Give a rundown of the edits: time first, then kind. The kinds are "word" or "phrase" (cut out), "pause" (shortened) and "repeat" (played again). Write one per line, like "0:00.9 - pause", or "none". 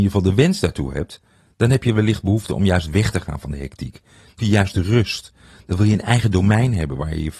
0:04.4 - word